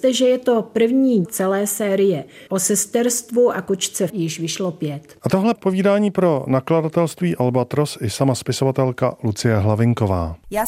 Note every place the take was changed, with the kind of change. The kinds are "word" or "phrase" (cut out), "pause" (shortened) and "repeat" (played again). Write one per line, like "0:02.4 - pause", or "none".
0:01.2 - word
0:02.5 - word
0:04.1 - word
0:05.5 - word